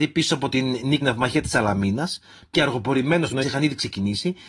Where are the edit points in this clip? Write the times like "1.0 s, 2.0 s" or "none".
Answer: 1.0 s, 2.5 s, 3.4 s